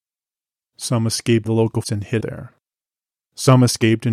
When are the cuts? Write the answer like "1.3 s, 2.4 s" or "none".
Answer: 1.4 s, 1.8 s, 2.2 s